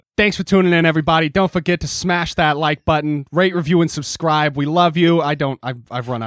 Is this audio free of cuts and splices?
yes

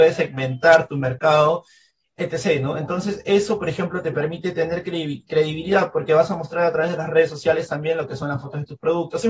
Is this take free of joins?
yes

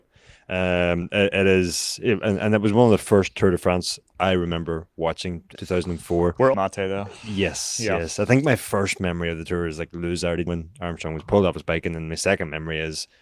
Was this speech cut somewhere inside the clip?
yes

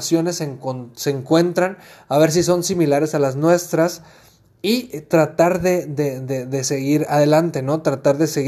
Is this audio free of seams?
yes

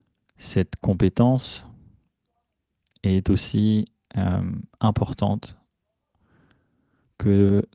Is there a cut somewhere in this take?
no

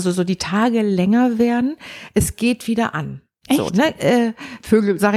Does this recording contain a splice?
no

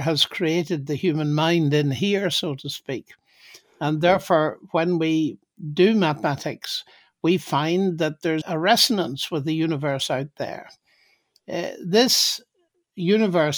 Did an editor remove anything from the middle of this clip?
yes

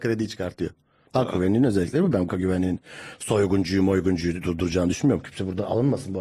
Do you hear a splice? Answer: yes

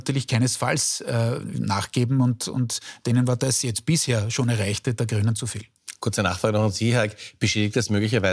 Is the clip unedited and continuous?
yes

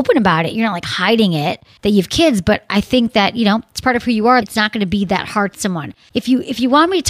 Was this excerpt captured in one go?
no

